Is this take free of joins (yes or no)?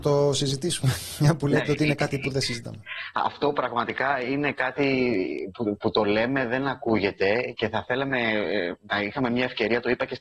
yes